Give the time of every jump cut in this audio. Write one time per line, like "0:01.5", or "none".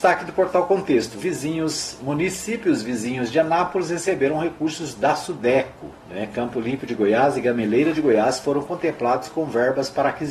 0:06.0